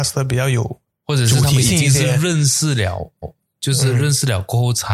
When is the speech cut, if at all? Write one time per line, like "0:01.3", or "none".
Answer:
0:03.2